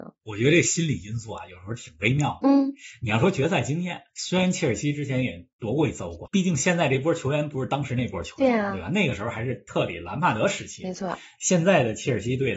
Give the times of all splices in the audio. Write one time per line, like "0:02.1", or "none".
0:04.1
0:06.3